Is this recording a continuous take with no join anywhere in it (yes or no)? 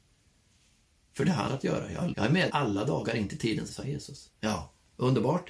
no